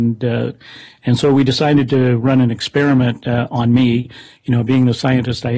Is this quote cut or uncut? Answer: uncut